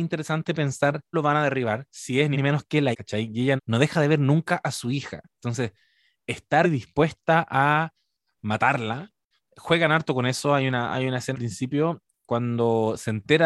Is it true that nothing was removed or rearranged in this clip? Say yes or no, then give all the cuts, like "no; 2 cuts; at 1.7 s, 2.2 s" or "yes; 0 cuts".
no; 6 cuts; at 1.1 s, 2.3 s, 2.9 s, 3.6 s, 6.6 s, 11.3 s